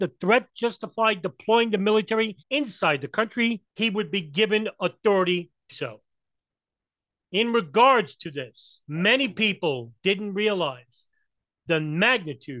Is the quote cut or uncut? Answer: cut